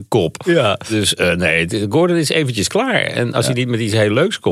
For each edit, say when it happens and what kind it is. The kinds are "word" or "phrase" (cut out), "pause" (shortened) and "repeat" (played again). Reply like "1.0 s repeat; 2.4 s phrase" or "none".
none

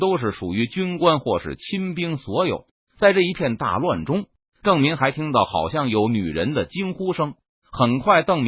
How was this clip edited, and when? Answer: none

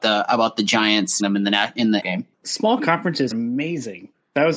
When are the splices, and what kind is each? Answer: 1.2 s word; 2.0 s phrase; 2.3 s pause; 3.3 s word

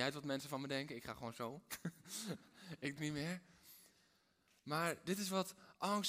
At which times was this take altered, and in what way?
3.0 s word

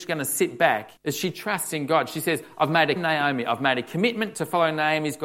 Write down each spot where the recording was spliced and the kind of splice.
1.0 s pause; 3.0 s phrase

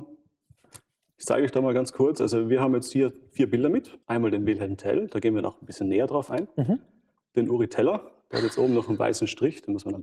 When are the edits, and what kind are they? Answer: 4.0 s pause

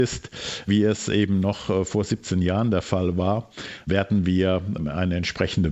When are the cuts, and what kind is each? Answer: none

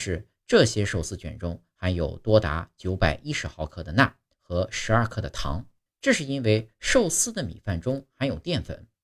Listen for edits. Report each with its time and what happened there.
4.3 s pause; 5.9 s pause

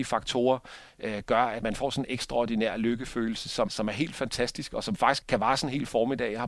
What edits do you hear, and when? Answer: 1.6 s word; 3.7 s word; 5.2 s word

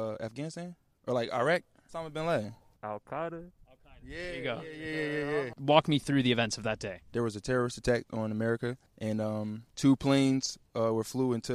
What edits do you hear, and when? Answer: 8.9 s pause; 9.7 s pause

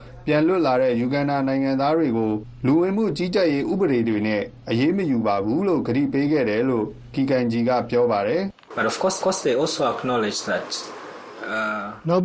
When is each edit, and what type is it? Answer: 9.2 s repeat

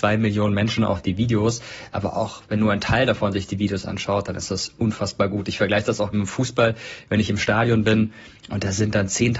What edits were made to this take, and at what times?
6.1 s word

